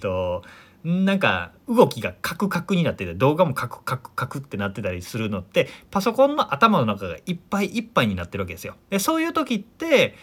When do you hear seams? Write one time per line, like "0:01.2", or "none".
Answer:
0:08.8